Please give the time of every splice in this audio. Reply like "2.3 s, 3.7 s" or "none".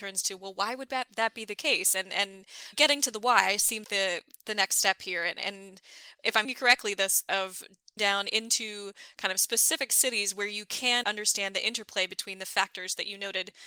2.7 s, 3.8 s, 6.4 s, 7.3 s, 8.0 s, 11.0 s